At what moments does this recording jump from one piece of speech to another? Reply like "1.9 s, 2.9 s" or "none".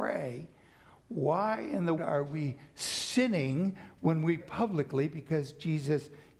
2.0 s, 4.4 s